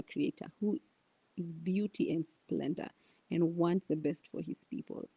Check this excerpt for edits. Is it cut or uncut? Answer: uncut